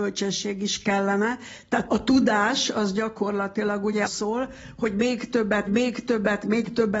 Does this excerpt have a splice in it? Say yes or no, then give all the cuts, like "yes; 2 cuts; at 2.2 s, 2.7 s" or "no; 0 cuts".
yes; 3 cuts; at 1.9 s, 4.1 s, 5.7 s